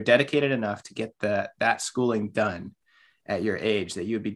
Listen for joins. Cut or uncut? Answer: uncut